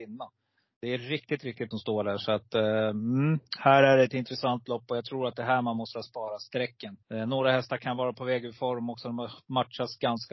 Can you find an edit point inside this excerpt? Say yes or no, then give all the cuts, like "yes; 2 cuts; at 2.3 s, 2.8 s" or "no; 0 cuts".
yes; 2 cuts; at 1.7 s, 7.0 s